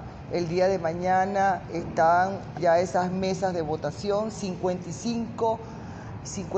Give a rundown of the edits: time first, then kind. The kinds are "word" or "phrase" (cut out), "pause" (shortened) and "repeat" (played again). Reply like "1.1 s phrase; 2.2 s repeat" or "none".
2.5 s word

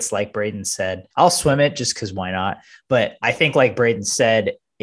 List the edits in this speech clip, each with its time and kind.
1.1 s pause

